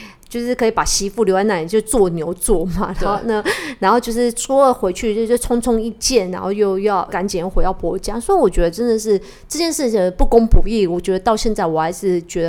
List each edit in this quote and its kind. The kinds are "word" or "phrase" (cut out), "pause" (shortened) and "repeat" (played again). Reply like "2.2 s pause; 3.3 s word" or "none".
none

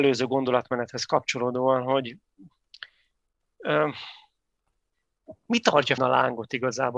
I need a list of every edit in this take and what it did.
6.0 s word

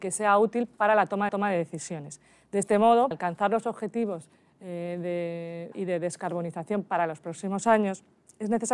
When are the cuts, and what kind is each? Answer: 1.3 s repeat; 3.1 s word; 5.7 s word

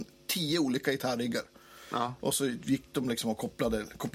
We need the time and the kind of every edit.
none

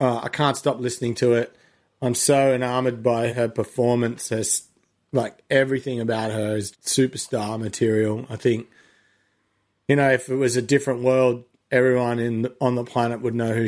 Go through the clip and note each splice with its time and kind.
3.3 s word; 6.7 s word

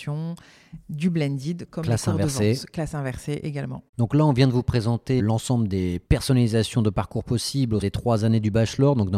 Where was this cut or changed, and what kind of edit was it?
3.9 s pause; 5.2 s word; 6.1 s pause; 7.8 s word

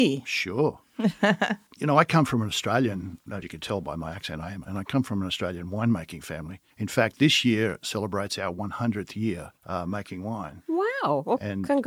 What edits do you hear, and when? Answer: 1.7 s word; 3.4 s word; 4.6 s word; 6.7 s pause; 9.6 s pause

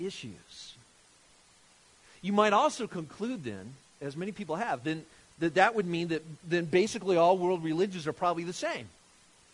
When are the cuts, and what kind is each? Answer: none

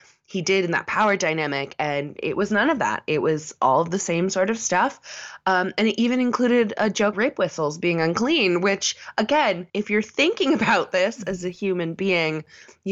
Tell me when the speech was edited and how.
7.1 s word; 9.7 s pause

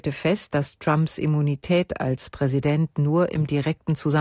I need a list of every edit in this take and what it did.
none

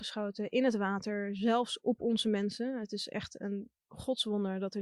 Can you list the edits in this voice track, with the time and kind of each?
none

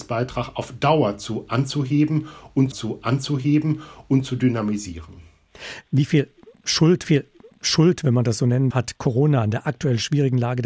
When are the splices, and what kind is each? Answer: 2.7 s repeat; 7.0 s repeat; 8.7 s word

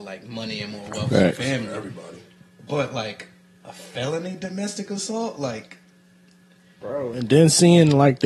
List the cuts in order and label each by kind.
none

